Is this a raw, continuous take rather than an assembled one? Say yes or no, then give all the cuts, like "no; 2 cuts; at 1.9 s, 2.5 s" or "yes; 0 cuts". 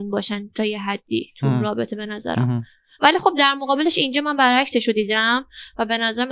yes; 0 cuts